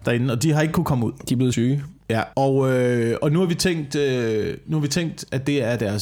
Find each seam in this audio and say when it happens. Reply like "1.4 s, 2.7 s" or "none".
1.5 s, 2.3 s